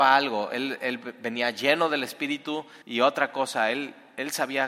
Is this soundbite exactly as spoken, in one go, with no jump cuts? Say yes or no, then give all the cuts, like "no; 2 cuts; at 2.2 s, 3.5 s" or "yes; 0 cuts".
no; 1 cut; at 2.8 s